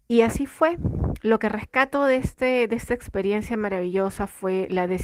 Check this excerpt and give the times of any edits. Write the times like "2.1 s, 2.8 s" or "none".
none